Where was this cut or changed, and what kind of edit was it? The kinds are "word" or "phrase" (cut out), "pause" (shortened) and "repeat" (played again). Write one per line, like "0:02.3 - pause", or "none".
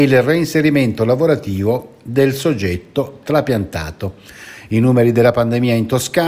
none